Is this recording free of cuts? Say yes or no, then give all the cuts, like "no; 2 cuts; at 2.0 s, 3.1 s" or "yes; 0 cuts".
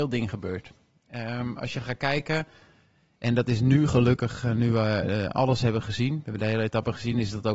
yes; 0 cuts